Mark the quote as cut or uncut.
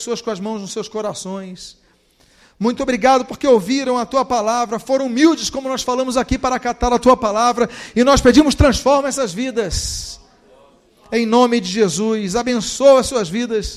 uncut